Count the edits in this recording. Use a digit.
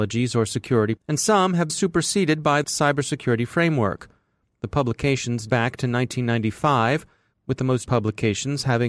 5